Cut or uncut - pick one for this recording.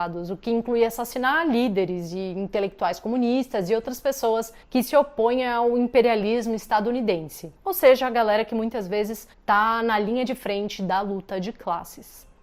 cut